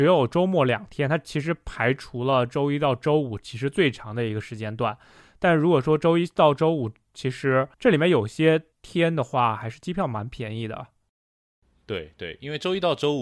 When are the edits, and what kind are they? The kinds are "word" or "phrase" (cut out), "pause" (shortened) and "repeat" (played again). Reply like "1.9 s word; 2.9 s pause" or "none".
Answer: 7.7 s pause; 8.7 s pause